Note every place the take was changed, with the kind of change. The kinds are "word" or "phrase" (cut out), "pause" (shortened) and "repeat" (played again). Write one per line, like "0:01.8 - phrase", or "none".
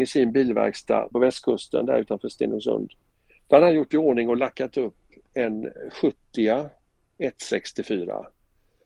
0:01.1 - word